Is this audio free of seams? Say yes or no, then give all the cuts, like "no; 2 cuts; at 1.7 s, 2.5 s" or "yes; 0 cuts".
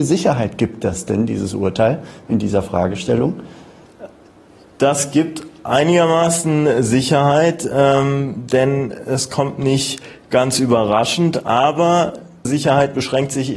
no; 1 cut; at 12.4 s